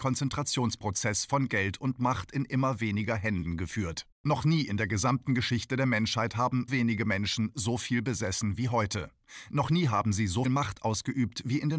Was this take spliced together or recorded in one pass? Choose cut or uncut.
cut